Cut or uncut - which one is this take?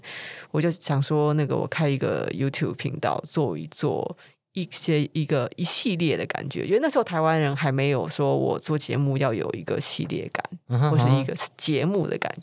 uncut